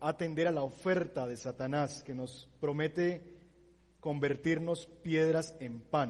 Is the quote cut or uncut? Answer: uncut